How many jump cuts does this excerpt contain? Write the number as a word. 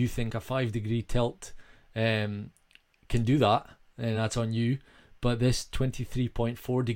zero